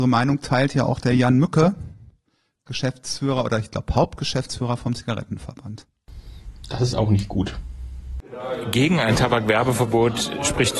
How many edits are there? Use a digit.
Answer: 0